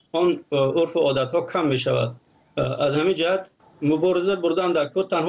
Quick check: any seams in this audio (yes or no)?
yes